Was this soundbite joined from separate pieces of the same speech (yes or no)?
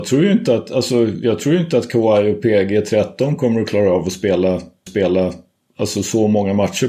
yes